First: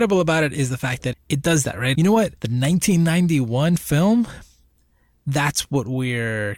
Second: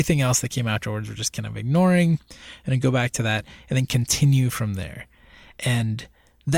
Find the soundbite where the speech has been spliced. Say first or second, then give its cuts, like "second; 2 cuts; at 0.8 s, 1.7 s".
first; 3 cuts; at 1.1 s, 1.9 s, 2.4 s